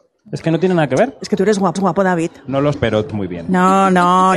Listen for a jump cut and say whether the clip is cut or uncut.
cut